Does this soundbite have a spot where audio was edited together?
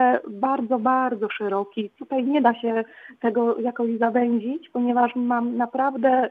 no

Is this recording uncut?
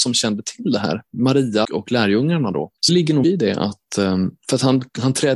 no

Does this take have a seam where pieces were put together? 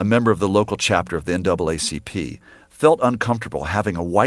no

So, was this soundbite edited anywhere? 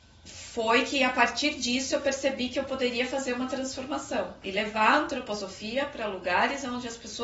no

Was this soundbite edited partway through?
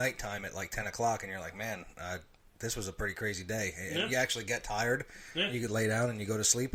no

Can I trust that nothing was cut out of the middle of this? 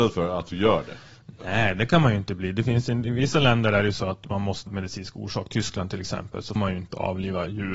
no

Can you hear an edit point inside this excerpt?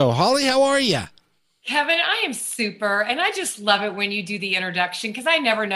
no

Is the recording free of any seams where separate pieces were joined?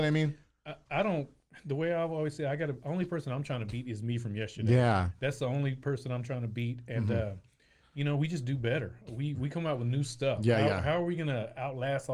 yes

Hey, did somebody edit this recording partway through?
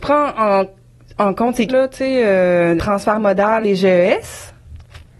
yes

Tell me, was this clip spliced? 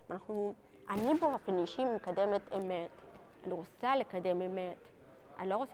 no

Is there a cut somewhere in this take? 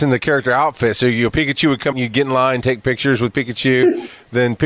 yes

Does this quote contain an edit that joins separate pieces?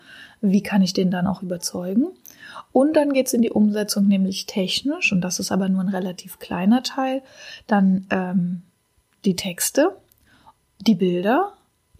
no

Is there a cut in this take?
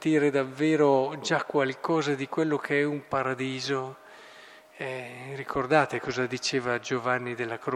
no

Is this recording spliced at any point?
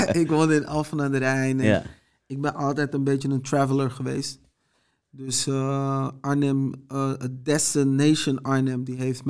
no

